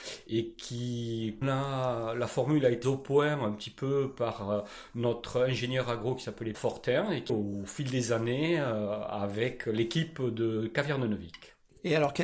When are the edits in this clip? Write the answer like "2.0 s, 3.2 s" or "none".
1.4 s, 2.8 s, 6.5 s, 7.3 s

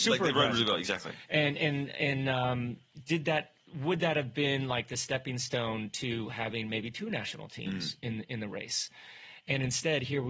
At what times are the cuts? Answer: 3.6 s

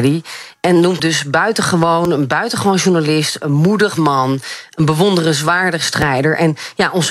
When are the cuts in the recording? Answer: 1.0 s

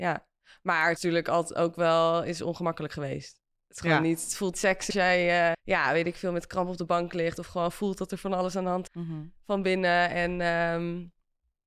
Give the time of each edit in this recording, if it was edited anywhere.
1.0 s, 4.5 s, 4.9 s, 5.5 s, 8.9 s

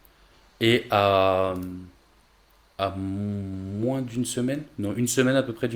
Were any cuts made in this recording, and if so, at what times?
2.2 s

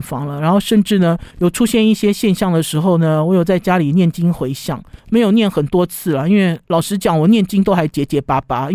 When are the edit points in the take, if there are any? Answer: 1.3 s, 5.0 s, 6.6 s

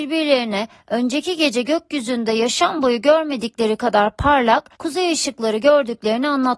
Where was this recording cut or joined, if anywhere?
4.8 s

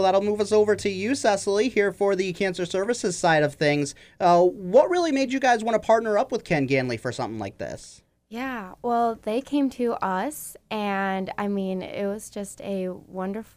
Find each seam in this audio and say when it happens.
none

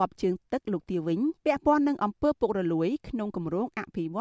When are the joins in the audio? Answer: 1.4 s

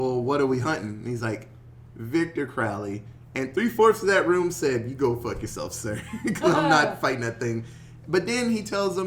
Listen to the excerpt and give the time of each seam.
none

